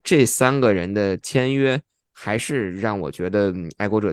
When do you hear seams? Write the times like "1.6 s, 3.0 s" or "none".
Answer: none